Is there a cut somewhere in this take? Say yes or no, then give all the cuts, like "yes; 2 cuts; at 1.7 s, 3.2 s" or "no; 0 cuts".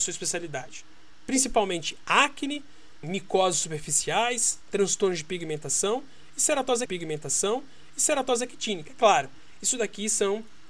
yes; 2 cuts; at 3.0 s, 6.9 s